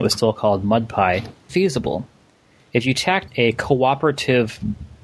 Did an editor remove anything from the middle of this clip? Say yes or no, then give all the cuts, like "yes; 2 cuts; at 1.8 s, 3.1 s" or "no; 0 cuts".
yes; 2 cuts; at 1.5 s, 3.3 s